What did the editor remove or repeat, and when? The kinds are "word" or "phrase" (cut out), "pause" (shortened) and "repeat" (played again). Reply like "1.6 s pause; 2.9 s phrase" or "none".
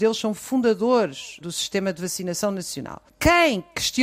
1.4 s word